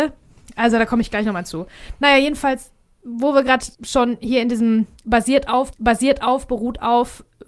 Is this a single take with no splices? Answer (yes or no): no